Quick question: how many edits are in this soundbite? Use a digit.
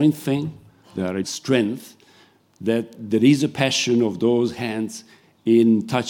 2